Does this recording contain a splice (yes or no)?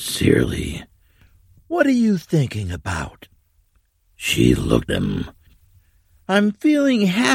yes